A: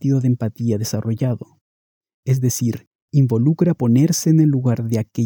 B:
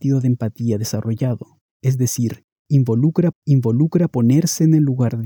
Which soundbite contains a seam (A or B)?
B